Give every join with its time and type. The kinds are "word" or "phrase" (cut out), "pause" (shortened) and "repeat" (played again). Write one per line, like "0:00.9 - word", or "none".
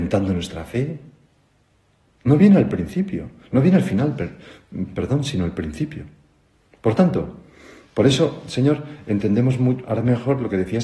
none